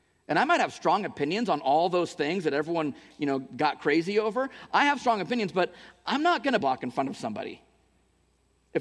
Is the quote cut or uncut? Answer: cut